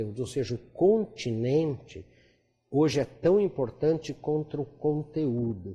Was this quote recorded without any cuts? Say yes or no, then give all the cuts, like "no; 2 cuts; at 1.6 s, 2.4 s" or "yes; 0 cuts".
yes; 0 cuts